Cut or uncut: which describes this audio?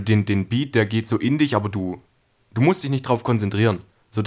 uncut